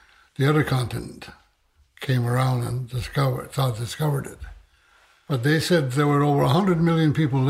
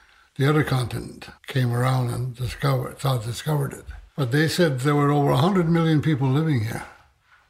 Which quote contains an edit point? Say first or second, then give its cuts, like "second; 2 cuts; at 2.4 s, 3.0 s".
second; 2 cuts; at 1.4 s, 4.1 s